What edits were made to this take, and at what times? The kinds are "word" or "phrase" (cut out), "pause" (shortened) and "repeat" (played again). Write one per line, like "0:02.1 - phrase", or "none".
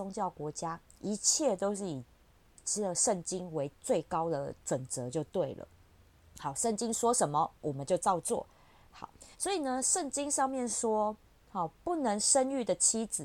0:09.3 - pause